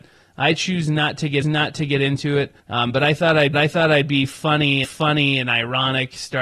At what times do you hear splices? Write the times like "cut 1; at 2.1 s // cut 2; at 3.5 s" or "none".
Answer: cut 1; at 1.4 s // cut 2; at 2.6 s // cut 3; at 3.5 s // cut 4; at 4.8 s